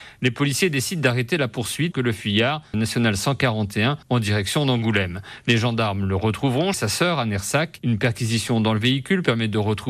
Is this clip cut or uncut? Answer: cut